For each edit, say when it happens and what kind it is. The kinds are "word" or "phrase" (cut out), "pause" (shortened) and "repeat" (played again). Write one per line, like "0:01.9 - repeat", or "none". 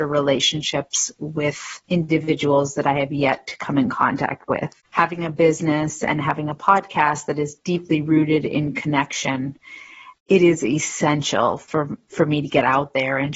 0:01.8 - pause
0:04.8 - pause
0:10.2 - pause